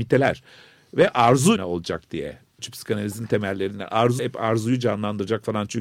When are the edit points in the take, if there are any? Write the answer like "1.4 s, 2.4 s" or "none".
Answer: 1.6 s, 2.6 s, 4.2 s